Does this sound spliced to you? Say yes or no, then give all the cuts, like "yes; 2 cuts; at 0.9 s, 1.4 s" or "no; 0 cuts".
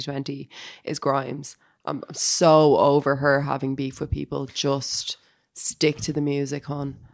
no; 0 cuts